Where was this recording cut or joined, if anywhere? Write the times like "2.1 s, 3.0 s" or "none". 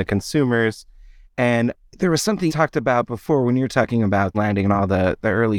2.5 s, 4.3 s

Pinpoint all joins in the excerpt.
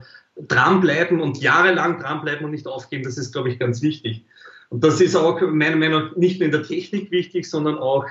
none

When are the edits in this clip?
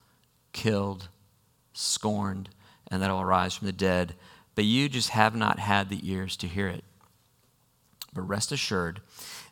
none

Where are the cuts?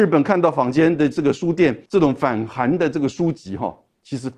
1.9 s

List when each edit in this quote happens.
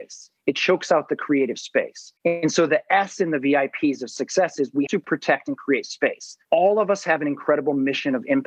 2.2 s, 4.9 s, 6.4 s

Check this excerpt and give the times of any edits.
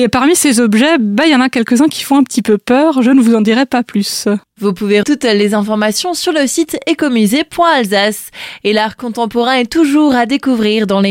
5.0 s

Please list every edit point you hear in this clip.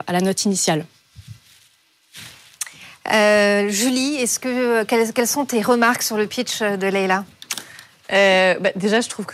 none

